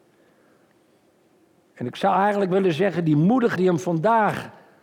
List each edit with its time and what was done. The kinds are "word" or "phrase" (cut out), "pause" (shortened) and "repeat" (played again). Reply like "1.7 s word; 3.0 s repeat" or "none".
3.6 s word

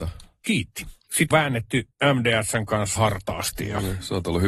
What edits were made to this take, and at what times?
1.3 s word; 1.9 s pause; 3.0 s phrase

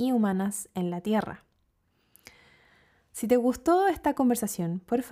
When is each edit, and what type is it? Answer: none

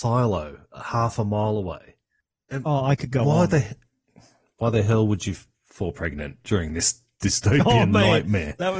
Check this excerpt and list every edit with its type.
none

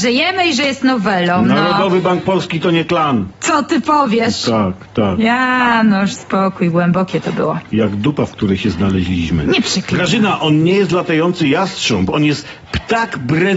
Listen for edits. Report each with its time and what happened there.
6.2 s word

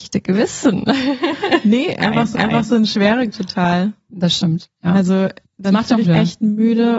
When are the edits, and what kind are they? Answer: 2.3 s repeat; 3.3 s word; 5.4 s pause; 6.0 s word

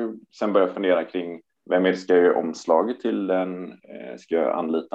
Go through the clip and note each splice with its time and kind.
none

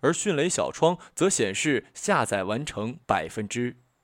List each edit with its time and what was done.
3.0 s pause

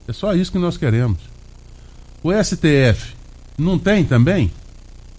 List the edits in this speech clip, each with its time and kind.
none

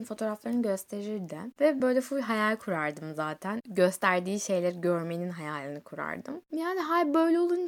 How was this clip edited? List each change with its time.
1.8 s phrase

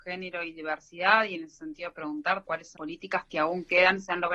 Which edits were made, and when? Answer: 2.4 s word; 2.8 s word

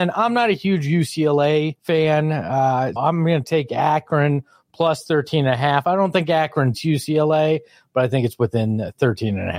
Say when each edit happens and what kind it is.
1.8 s pause; 3.0 s word; 6.7 s word

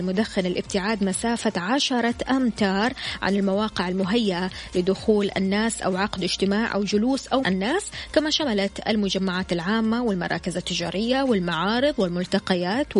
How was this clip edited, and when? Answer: 7.4 s word

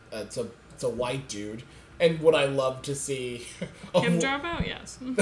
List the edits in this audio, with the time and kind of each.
none

